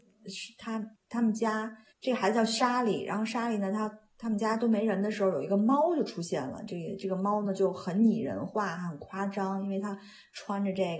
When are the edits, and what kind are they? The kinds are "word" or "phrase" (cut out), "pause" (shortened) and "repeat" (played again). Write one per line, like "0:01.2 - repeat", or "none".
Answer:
0:01.0 - pause
0:01.9 - pause

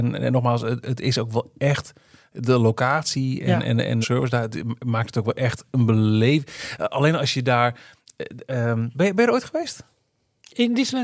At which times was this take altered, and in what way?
0:04.0 - phrase

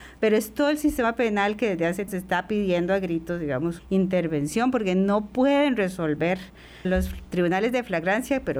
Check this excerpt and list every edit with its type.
0:02.1 - word
0:03.8 - word
0:06.8 - word

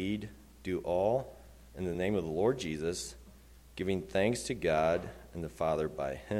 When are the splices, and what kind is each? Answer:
none

